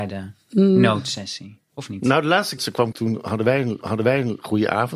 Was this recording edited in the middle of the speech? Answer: yes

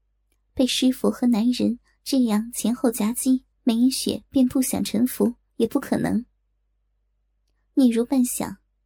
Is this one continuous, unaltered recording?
no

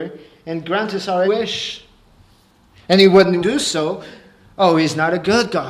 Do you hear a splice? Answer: yes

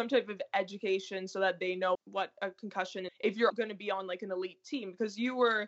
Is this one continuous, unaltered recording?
no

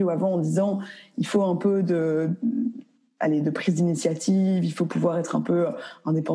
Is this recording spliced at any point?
no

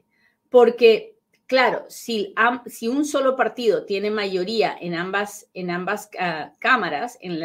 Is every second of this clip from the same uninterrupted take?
yes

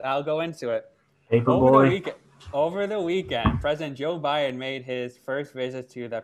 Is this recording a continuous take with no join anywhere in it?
yes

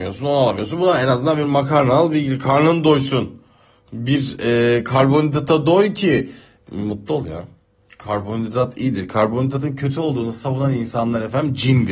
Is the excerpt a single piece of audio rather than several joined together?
yes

